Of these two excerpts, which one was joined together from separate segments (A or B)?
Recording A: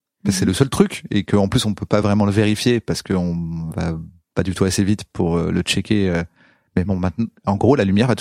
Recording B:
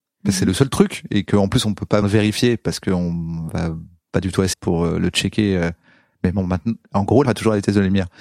B